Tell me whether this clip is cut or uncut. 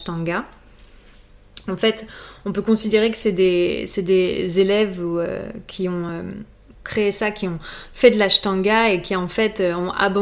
uncut